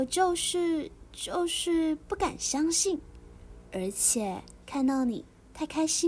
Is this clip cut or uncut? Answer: cut